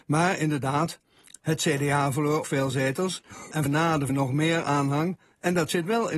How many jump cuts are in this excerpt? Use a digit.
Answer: 3